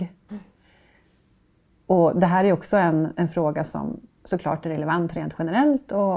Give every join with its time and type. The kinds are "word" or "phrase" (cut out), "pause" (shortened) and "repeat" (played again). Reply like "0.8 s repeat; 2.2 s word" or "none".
none